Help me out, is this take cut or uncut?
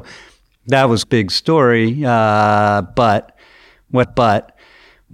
cut